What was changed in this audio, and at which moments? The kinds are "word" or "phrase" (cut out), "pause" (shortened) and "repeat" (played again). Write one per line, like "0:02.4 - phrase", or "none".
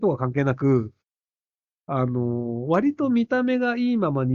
none